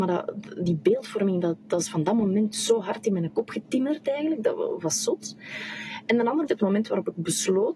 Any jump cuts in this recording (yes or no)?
yes